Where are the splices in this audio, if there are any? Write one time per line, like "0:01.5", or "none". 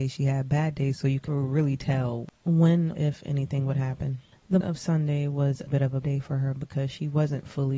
0:01.3
0:02.9
0:04.6
0:05.7
0:06.0